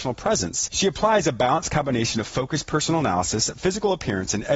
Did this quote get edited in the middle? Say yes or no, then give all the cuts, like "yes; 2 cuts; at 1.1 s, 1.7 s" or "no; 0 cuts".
no; 0 cuts